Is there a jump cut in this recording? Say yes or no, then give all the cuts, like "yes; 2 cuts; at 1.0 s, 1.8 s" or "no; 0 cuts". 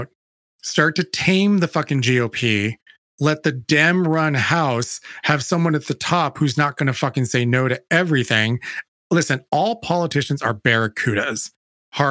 no; 0 cuts